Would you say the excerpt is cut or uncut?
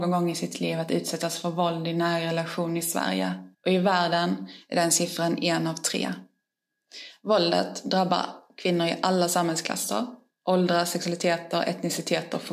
cut